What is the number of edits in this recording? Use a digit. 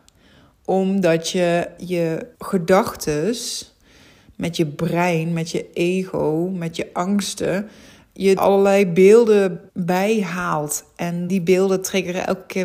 5